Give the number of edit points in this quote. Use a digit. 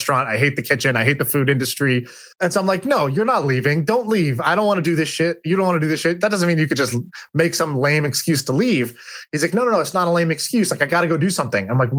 1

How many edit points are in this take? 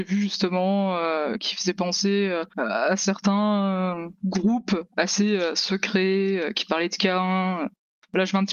0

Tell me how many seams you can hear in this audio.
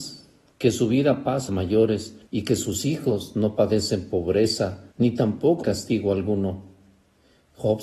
4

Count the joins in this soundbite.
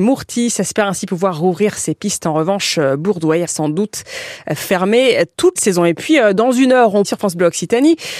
3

